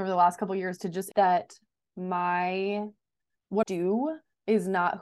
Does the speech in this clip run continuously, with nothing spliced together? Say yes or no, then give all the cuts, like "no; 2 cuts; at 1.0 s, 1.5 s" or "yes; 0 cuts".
no; 2 cuts; at 1.1 s, 3.6 s